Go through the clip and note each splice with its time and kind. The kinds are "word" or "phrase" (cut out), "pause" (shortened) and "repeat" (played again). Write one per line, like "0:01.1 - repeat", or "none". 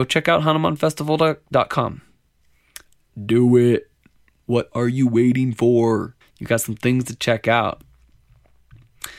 0:06.2 - pause